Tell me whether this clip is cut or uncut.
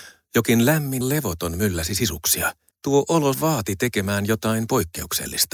cut